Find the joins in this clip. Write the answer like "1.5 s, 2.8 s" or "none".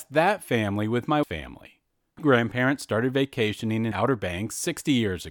1.2 s, 2.2 s, 3.9 s